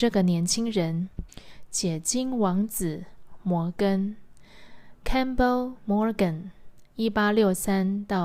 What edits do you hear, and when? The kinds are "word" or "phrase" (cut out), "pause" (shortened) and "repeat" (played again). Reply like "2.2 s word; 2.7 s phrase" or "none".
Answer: 1.3 s pause; 6.9 s pause